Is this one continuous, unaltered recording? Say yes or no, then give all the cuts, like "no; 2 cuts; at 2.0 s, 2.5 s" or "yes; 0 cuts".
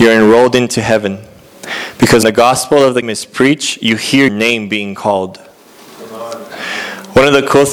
no; 3 cuts; at 2.2 s, 3.0 s, 4.3 s